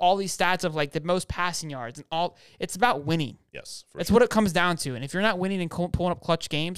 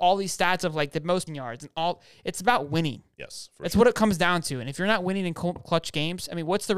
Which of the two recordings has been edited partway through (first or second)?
second